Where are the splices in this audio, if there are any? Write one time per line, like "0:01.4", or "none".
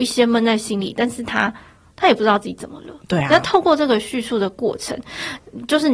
none